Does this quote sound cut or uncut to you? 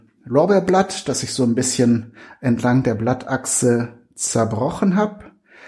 uncut